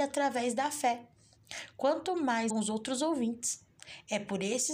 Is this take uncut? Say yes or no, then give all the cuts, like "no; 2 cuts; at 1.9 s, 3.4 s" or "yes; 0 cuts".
no; 1 cut; at 2.5 s